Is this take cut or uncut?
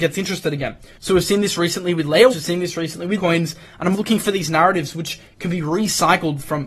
cut